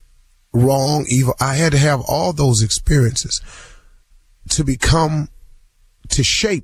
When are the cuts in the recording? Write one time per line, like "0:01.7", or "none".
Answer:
none